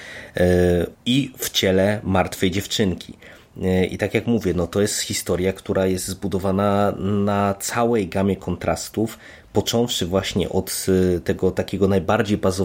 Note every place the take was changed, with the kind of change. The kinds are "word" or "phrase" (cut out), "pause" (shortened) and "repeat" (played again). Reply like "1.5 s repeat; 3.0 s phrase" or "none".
0.9 s phrase